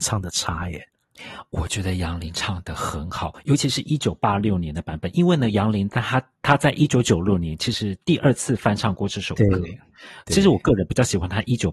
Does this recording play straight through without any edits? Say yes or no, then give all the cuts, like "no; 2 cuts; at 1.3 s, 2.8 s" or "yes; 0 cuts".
yes; 0 cuts